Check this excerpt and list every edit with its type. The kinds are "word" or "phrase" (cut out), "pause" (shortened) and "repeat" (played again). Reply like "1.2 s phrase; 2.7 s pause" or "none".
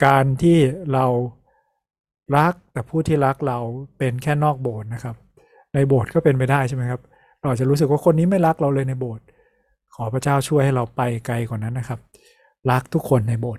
none